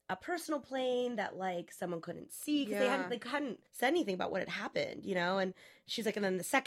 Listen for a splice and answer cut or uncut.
cut